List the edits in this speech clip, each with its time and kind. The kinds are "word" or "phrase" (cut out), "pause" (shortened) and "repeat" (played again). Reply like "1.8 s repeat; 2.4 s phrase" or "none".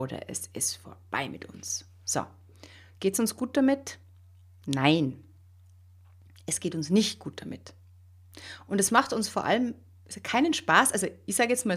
none